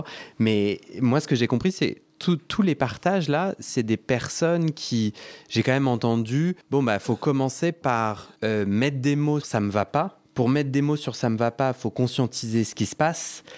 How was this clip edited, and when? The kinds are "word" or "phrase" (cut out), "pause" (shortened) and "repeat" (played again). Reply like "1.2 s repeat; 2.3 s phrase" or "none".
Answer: 6.6 s pause; 8.4 s pause; 9.4 s word; 10.2 s pause